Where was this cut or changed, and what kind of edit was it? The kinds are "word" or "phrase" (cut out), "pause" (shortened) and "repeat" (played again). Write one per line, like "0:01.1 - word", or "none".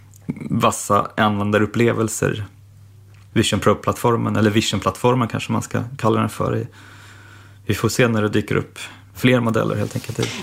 none

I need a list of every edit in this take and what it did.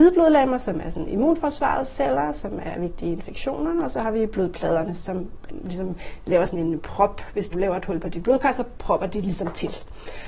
0:05.5 - word
0:07.5 - word

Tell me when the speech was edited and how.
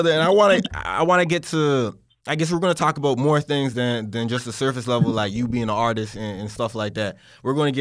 none

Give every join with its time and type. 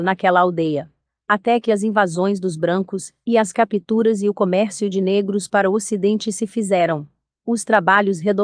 none

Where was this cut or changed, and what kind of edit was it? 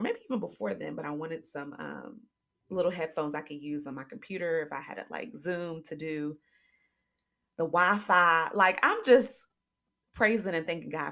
none

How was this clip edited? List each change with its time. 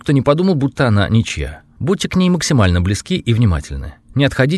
none

